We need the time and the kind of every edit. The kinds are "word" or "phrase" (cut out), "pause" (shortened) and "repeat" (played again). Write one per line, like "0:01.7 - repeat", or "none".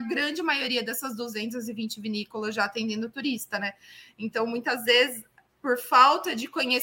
none